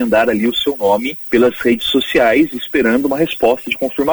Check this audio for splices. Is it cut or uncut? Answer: uncut